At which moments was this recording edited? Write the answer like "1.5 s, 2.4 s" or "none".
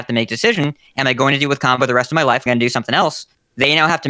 2.5 s

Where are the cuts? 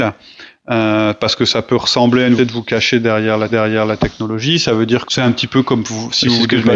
2.4 s, 3.5 s, 5.1 s

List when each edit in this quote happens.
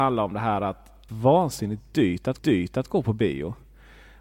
1.1 s, 2.4 s

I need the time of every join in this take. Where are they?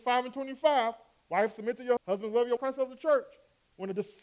2.0 s, 2.6 s

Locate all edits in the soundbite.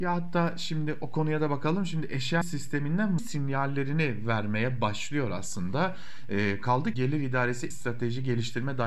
2.4 s, 3.2 s, 6.9 s, 7.7 s

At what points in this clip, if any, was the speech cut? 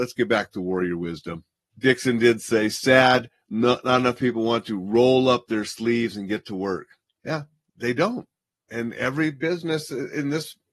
none

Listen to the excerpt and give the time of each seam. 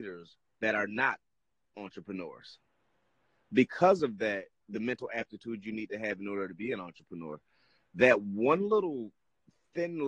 none

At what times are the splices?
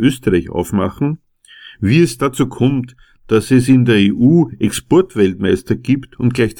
none

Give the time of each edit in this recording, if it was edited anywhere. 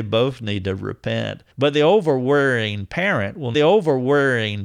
1.5 s, 3.5 s

